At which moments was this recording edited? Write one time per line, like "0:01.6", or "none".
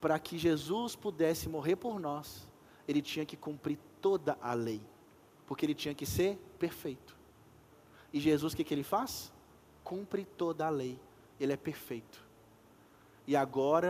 none